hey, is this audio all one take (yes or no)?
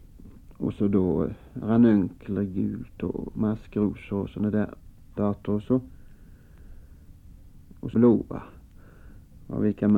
no